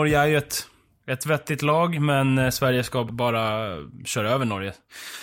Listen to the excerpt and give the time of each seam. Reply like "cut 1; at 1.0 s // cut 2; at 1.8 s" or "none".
cut 1; at 3.1 s